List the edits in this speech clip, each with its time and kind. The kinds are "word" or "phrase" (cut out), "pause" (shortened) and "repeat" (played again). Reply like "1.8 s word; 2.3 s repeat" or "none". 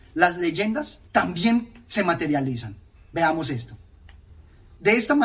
1.0 s pause; 2.9 s pause